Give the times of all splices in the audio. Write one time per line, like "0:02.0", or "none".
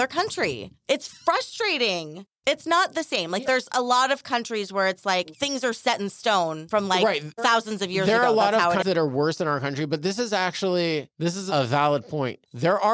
0:08.8